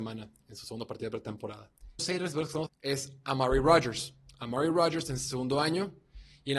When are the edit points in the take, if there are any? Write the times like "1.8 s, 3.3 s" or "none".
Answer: 2.0 s, 2.7 s